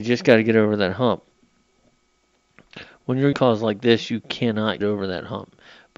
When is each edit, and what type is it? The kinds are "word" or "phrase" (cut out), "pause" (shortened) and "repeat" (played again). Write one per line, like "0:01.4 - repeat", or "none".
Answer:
0:03.3 - word
0:04.8 - word

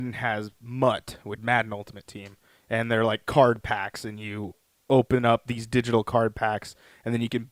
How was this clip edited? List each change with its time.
0:01.4 - word

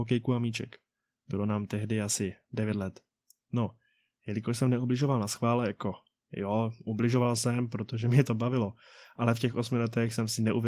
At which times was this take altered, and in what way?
none

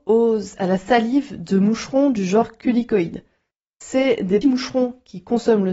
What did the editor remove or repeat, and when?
0:04.4 - word

